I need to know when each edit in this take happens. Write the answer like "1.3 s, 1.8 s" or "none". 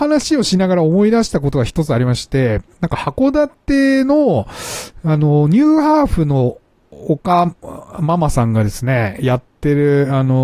none